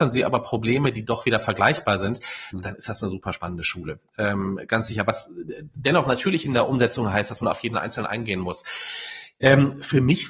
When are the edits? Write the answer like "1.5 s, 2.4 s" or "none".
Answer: none